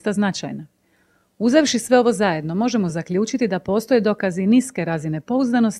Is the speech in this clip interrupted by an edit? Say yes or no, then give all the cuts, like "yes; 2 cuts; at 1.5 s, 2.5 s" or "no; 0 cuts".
no; 0 cuts